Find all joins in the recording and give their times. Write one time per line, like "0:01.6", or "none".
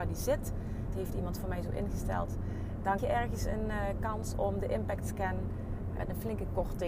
0:00.9
0:03.0
0:06.0